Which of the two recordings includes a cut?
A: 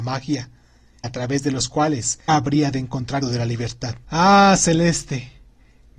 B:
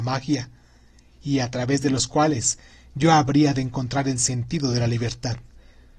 A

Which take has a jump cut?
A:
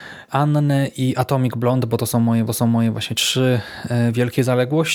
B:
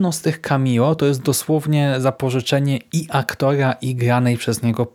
A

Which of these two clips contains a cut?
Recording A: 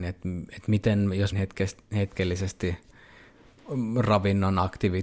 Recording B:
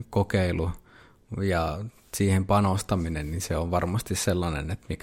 A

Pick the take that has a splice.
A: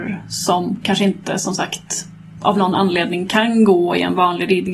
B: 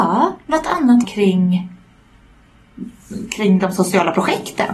B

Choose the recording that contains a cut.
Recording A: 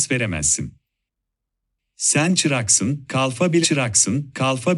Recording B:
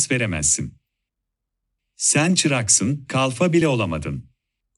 A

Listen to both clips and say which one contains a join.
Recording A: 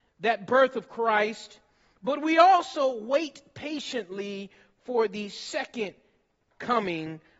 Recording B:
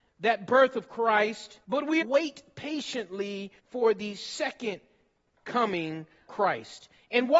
B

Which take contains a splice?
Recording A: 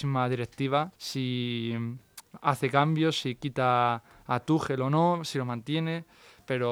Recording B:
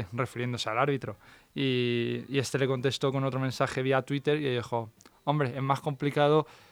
A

